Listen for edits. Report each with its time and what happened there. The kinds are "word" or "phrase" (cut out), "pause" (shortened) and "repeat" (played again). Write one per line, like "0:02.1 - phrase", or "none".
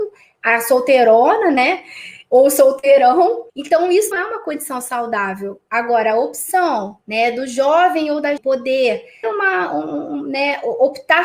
0:03.5 - pause
0:04.1 - phrase
0:07.0 - pause
0:08.4 - word
0:09.2 - word